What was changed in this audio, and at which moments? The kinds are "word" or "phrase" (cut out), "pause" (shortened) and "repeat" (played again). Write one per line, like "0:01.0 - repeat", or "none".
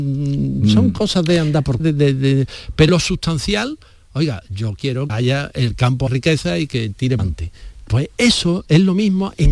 0:01.8 - word
0:02.9 - word
0:05.1 - word
0:06.1 - word
0:07.2 - word